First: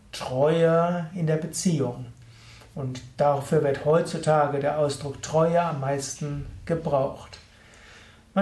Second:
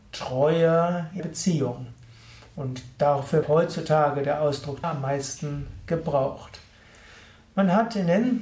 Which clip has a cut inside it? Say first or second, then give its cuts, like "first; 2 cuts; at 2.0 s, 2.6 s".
second; 3 cuts; at 1.2 s, 3.4 s, 4.8 s